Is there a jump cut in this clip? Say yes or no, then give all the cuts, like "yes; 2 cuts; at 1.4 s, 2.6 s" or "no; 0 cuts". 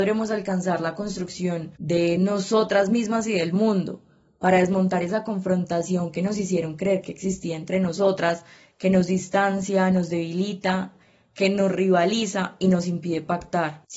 no; 0 cuts